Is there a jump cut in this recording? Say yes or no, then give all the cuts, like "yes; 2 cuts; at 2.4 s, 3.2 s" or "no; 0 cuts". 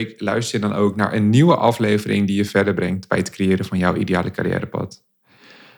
no; 0 cuts